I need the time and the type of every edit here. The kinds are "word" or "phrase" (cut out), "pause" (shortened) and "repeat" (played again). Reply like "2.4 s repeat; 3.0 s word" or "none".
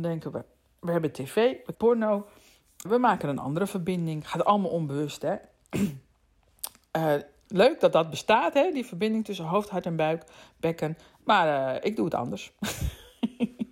1.7 s word; 2.9 s word; 7.5 s word